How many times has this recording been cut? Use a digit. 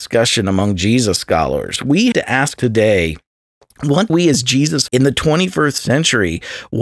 4